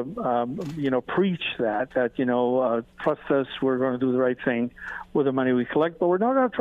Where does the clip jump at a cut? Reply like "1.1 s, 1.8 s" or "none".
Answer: 2.9 s

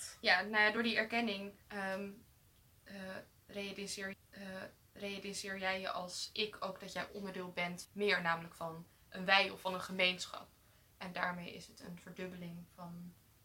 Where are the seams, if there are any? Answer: 1.6 s, 4.1 s, 7.8 s

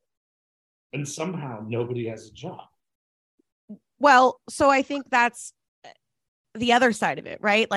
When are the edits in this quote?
none

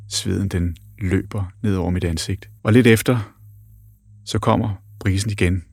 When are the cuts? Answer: 2.6 s

